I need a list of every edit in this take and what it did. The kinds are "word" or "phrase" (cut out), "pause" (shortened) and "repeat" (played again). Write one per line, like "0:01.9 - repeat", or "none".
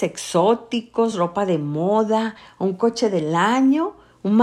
none